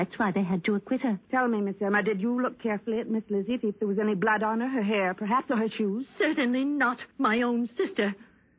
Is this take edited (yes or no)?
yes